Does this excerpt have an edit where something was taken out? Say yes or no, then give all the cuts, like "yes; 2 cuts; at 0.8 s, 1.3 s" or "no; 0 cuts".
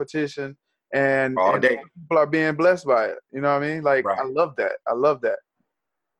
no; 0 cuts